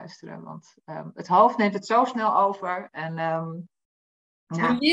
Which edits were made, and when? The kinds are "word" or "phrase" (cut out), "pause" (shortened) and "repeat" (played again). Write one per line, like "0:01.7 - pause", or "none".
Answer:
none